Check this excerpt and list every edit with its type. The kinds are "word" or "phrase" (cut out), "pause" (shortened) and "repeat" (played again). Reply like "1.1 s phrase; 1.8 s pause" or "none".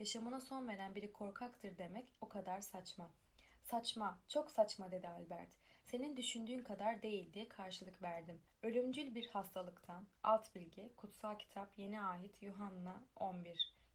2.2 s pause